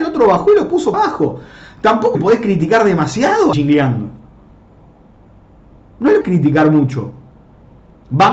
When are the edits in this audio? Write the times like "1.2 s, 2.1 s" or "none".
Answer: 0.9 s, 2.1 s, 3.5 s, 6.2 s